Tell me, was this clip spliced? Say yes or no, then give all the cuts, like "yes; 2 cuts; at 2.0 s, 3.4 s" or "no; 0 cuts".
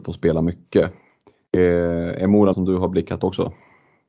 yes; 2 cuts; at 2.5 s, 3.2 s